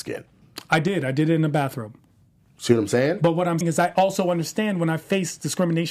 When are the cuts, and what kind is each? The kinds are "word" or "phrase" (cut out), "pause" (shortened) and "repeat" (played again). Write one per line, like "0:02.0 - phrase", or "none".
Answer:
0:03.6 - word

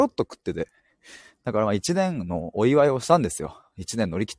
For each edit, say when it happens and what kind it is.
none

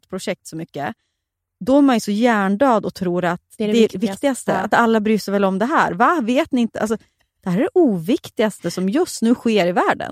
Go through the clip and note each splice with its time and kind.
none

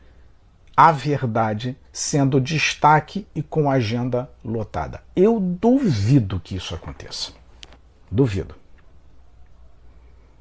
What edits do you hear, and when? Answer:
0:01.8 - pause
0:07.8 - pause

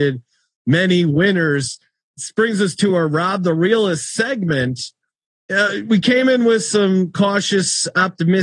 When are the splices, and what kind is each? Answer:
none

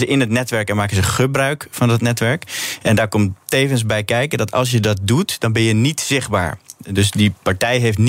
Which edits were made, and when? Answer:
none

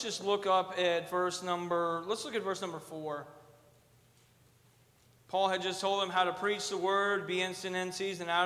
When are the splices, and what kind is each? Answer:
none

